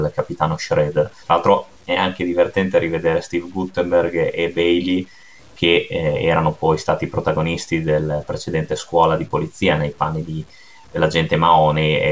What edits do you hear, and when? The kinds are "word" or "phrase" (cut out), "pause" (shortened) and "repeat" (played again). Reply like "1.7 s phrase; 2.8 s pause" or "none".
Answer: 1.2 s pause